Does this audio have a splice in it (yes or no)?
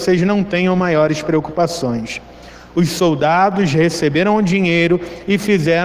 no